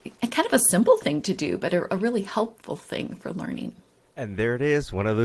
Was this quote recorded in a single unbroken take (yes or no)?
yes